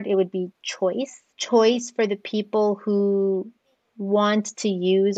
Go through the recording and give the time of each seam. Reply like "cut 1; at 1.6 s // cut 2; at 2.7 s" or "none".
cut 1; at 1.3 s